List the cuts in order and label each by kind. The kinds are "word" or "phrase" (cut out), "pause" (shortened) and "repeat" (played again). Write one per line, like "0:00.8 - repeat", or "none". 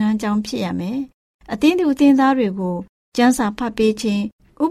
none